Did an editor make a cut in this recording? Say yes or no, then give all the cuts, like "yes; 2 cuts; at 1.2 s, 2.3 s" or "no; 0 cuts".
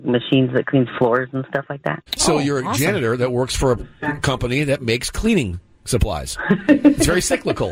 yes; 1 cut; at 2.1 s